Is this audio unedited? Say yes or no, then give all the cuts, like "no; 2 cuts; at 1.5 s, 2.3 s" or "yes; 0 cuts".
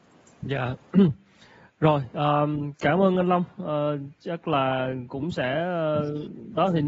yes; 0 cuts